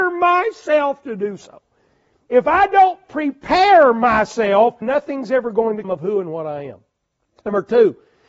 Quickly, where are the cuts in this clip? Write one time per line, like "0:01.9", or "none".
0:04.8
0:05.8